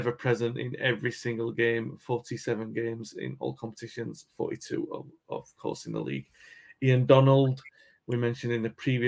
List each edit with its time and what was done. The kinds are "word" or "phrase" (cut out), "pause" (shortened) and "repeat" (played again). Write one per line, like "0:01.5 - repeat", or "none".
none